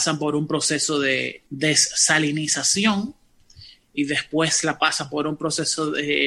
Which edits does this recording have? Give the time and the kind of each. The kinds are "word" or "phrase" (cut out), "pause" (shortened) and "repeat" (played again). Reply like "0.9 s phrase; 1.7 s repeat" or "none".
1.5 s pause